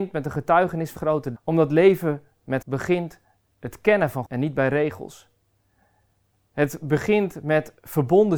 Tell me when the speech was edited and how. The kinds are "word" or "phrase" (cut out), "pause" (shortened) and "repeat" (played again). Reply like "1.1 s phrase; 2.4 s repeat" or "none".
1.0 s word; 1.3 s word; 2.6 s word; 3.5 s word; 4.2 s word